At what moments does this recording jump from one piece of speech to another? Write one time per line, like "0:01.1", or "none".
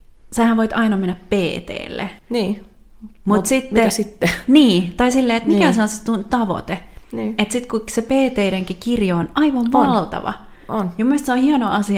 0:02.2